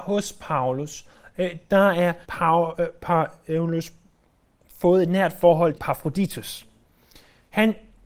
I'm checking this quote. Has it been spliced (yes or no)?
yes